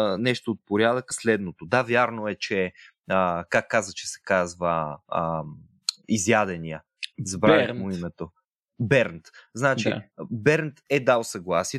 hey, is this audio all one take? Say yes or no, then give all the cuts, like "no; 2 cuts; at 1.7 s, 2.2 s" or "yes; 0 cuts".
no; 1 cut; at 1.1 s